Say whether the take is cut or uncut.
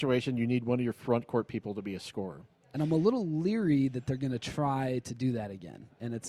uncut